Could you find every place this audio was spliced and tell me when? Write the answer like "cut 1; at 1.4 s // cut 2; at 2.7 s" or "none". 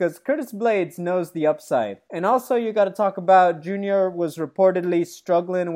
cut 1; at 2.1 s